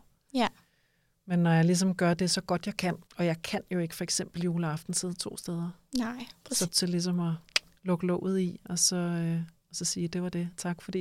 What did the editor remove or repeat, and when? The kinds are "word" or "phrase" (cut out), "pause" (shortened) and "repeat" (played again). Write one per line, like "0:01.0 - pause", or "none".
0:03.1 - pause
0:06.7 - phrase